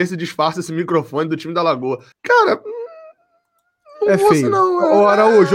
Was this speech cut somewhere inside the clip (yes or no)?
yes